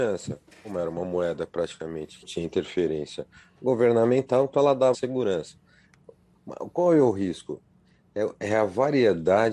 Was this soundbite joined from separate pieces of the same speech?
yes; 2 cuts; at 2.2 s, 4.9 s

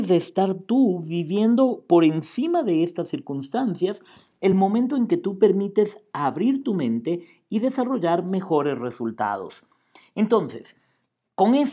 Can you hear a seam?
no; 0 cuts

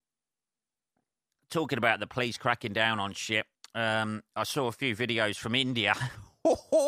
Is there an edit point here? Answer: yes; 1 cut; at 3.5 s

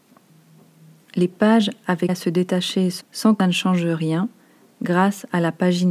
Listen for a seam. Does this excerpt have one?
yes; 3 cuts; at 2.1 s, 3.0 s, 3.4 s

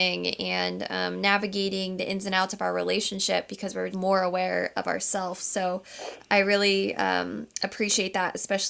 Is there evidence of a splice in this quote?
yes; 1 cut; at 3.9 s

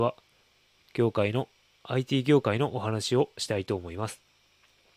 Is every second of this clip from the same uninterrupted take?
yes; 0 cuts

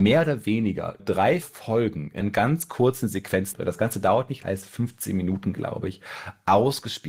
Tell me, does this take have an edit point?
yes; 5 cuts; at 1.0 s, 1.4 s, 2.2 s, 3.5 s, 4.4 s

